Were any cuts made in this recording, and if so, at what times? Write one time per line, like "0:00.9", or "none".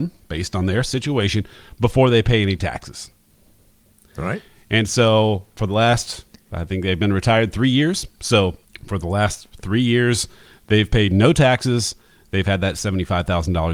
none